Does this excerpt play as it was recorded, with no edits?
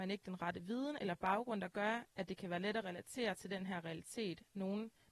yes; 0 cuts

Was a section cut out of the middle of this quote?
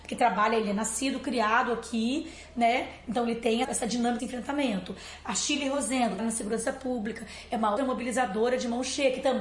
yes; 4 cuts; at 3.6 s, 4.2 s, 6.2 s, 7.8 s

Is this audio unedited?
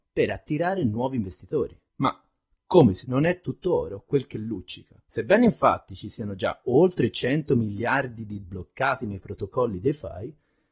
no; 4 cuts; at 1.9 s, 3.0 s, 5.0 s, 8.4 s

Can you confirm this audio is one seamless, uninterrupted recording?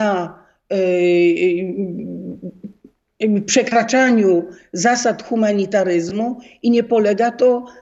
yes; 0 cuts

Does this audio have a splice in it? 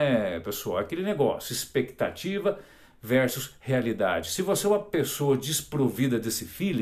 no; 0 cuts

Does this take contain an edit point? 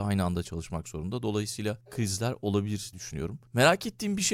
yes; 2 cuts; at 1.8 s, 2.9 s

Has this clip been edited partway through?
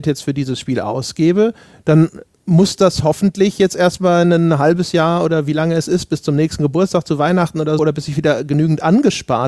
yes; 1 cut; at 7.8 s

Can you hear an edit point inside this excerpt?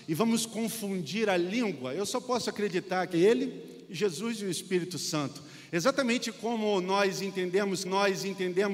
yes; 2 cuts; at 3.1 s, 7.8 s

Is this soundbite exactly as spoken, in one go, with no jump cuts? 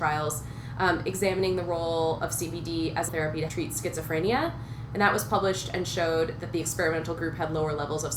no; 2 cuts; at 3.1 s, 3.5 s

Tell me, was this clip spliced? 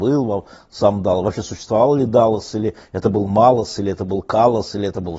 no; 0 cuts

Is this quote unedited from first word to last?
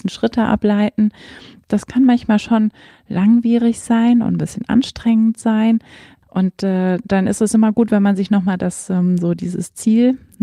yes; 0 cuts

